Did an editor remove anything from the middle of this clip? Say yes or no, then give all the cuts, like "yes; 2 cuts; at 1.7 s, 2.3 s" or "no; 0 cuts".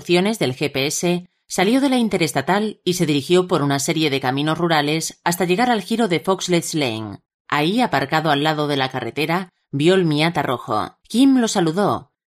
yes; 2 cuts; at 7.3 s, 11.0 s